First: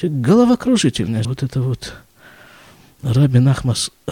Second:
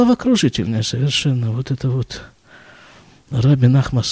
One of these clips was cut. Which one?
first; 1 cut; at 1.2 s

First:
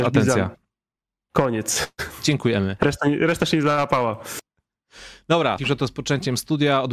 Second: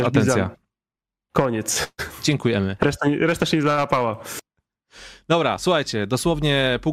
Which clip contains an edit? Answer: first; 1 cut; at 5.6 s

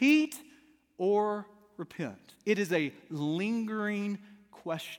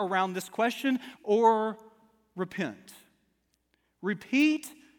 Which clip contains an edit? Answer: second; 1 cut; at 1.2 s

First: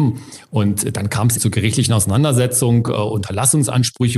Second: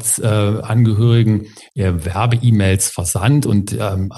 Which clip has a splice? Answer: first; 1 cut; at 1.4 s

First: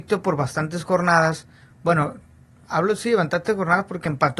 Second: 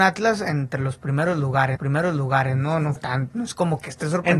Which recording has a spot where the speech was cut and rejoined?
second; 2 cuts; at 1.7 s, 3.0 s

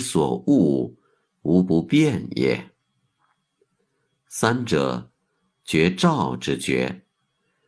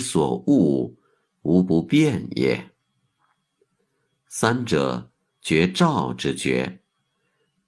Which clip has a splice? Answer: second; 1 cut; at 5.3 s

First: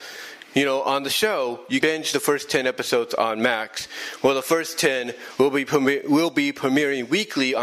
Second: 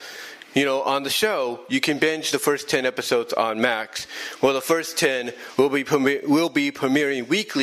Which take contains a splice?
first; 1 cut; at 1.8 s

